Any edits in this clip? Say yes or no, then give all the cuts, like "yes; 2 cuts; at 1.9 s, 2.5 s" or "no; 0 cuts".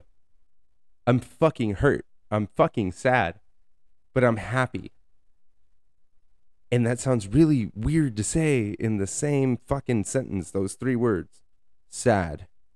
no; 0 cuts